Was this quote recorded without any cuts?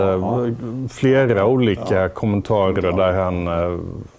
yes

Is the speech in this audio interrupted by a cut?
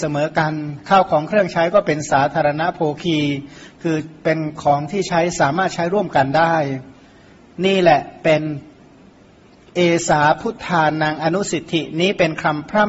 no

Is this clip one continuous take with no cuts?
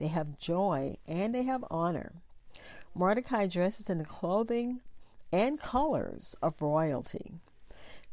yes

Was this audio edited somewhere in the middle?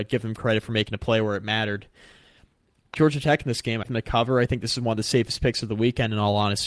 yes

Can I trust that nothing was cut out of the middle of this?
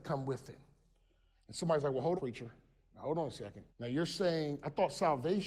no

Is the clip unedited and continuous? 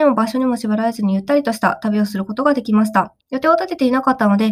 no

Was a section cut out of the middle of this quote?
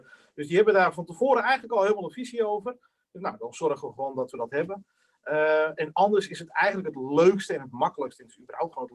no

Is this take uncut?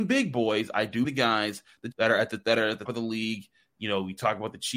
no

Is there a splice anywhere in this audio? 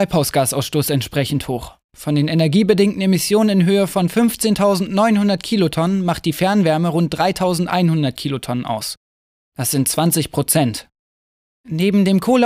no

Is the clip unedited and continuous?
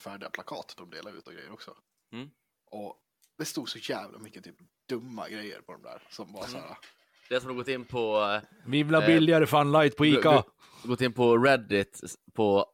yes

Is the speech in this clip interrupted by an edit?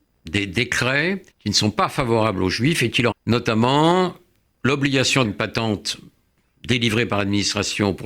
yes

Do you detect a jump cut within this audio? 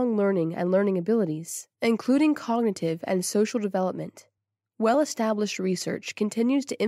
no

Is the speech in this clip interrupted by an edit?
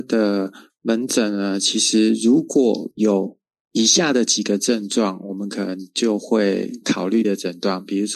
yes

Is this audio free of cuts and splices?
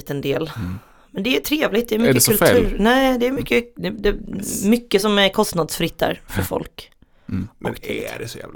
yes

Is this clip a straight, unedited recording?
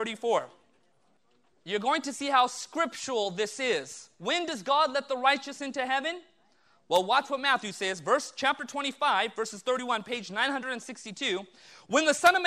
yes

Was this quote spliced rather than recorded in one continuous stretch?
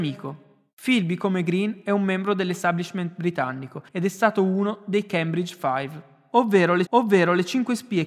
yes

